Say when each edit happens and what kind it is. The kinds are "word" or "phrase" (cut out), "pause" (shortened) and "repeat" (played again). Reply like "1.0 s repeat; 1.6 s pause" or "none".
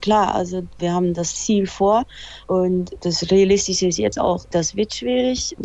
2.4 s pause